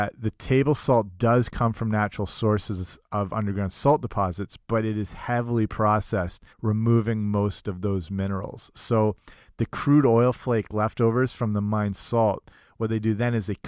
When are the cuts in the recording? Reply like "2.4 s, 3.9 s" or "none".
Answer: 6.5 s